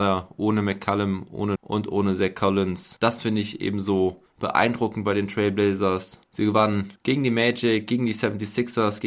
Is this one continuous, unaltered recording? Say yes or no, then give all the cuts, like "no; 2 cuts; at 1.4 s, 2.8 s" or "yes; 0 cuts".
no; 2 cuts; at 1.6 s, 7.0 s